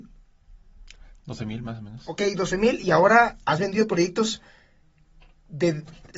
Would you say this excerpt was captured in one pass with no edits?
yes; 0 cuts

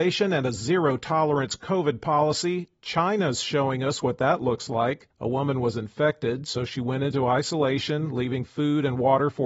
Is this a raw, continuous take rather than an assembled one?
no; 1 cut; at 5.1 s

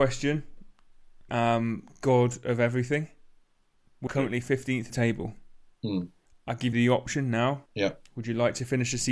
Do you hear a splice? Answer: yes; 6 cuts; at 1.3 s, 4.1 s, 4.9 s, 6.3 s, 6.7 s, 7.7 s

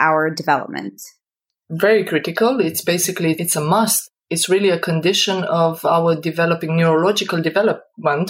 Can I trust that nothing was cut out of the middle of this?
yes; 0 cuts

